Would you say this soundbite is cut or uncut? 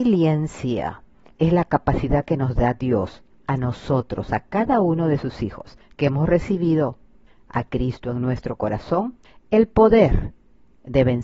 uncut